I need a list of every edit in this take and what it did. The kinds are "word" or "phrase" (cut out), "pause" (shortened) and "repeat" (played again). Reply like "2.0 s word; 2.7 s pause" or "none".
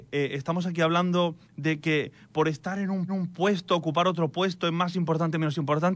1.4 s pause; 3.1 s repeat